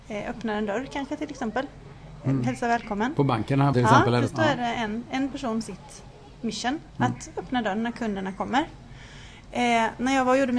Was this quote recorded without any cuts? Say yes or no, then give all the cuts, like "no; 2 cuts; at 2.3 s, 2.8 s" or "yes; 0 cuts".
no; 3 cuts; at 3.7 s, 4.3 s, 5.6 s